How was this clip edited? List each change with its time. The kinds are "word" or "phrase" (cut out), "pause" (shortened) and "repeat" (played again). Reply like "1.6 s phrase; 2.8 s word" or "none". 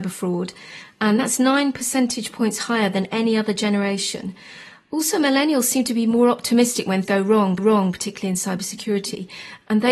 7.0 s word; 7.6 s repeat